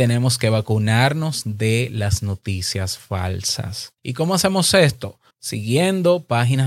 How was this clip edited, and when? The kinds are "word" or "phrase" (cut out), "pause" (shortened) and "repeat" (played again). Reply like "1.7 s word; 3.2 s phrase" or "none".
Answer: 4.0 s pause; 5.3 s pause